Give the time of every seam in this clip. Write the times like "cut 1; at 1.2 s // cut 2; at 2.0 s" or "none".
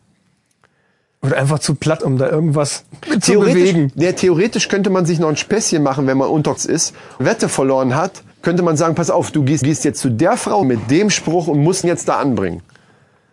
cut 1; at 2.0 s // cut 2; at 6.6 s // cut 3; at 7.2 s // cut 4; at 8.3 s // cut 5; at 9.6 s // cut 6; at 10.6 s // cut 7; at 11.8 s